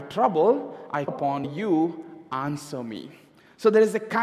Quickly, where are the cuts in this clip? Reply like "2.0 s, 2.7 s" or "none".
1.1 s, 1.4 s